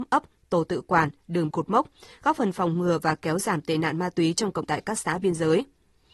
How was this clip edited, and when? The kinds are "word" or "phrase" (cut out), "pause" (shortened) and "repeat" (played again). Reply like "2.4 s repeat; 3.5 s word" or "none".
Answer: 1.5 s word; 4.6 s word

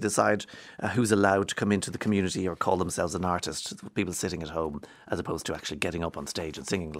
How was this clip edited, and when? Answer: none

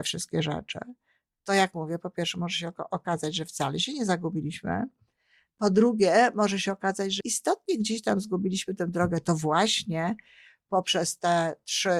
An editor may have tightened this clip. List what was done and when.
7.2 s word

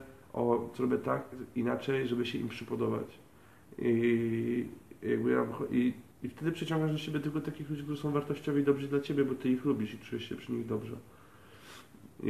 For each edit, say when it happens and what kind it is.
6.1 s pause

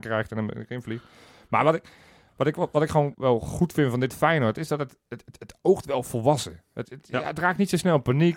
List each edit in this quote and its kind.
3.1 s word; 6.8 s word

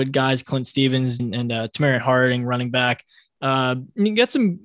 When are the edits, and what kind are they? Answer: 1.2 s word

